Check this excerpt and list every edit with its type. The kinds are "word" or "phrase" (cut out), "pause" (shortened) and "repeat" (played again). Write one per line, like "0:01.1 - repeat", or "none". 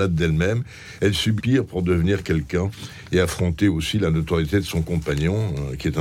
0:01.4 - word